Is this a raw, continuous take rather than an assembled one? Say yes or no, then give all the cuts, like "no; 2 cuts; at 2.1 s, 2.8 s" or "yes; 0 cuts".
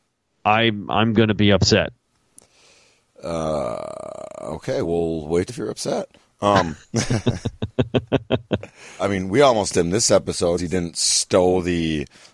no; 5 cuts; at 4.8 s, 5.5 s, 9.0 s, 9.7 s, 10.6 s